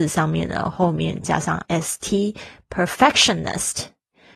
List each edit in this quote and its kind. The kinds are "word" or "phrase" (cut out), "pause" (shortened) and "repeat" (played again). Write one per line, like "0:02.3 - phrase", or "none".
0:01.7 - word

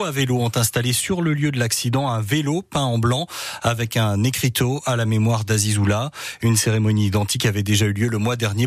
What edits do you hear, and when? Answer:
none

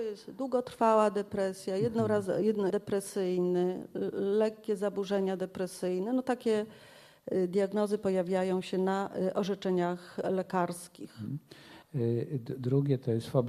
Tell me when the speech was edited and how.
0:02.7 - word
0:11.8 - pause

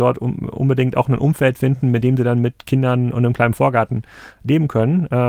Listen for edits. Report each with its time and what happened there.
none

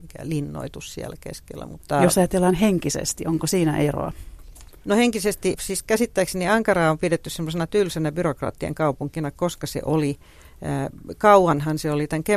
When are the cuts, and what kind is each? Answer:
none

